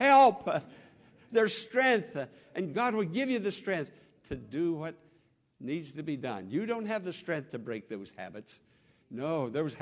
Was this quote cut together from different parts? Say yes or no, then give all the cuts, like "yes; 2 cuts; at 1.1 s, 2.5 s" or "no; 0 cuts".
no; 0 cuts